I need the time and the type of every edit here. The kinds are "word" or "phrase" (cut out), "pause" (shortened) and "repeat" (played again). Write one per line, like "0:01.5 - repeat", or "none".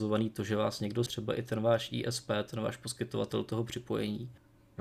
0:01.1 - word